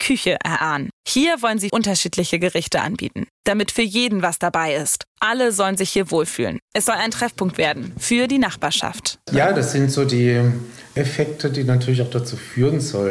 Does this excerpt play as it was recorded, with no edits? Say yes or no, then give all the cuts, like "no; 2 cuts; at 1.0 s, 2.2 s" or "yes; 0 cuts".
no; 1 cut; at 1.7 s